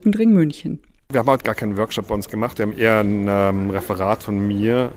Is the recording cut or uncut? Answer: cut